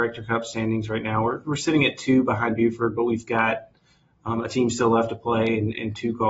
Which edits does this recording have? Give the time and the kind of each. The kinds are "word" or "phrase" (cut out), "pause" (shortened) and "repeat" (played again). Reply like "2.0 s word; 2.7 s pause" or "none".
none